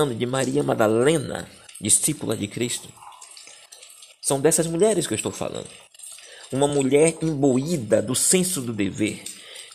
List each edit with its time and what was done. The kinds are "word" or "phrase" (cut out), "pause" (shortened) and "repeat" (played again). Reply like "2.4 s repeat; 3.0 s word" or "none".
none

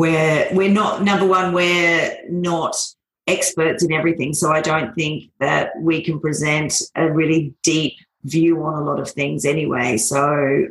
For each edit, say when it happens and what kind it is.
none

